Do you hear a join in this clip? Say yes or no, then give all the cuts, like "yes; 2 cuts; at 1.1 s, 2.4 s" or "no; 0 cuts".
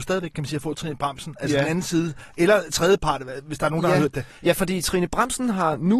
no; 0 cuts